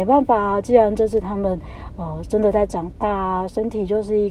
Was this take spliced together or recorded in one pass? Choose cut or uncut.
uncut